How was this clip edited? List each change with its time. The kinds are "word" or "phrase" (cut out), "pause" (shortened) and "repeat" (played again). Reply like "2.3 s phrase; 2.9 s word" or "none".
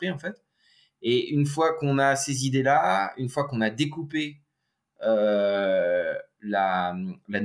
none